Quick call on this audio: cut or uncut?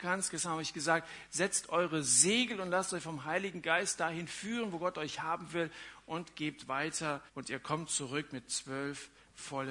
cut